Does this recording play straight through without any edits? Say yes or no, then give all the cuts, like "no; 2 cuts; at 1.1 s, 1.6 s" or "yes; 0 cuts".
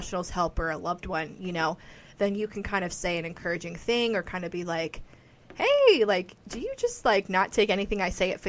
yes; 0 cuts